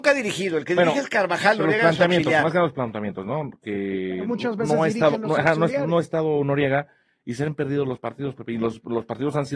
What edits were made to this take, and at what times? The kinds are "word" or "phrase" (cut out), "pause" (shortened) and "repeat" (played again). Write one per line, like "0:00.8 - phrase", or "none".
none